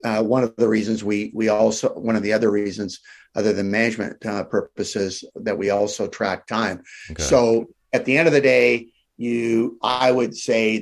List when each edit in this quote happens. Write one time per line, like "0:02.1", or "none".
none